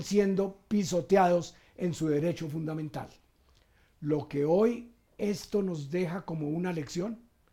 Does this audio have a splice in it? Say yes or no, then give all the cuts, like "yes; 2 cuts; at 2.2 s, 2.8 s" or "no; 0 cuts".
no; 0 cuts